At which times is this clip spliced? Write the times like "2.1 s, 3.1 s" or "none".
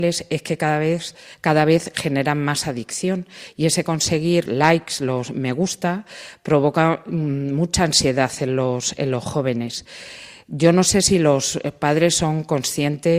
4.5 s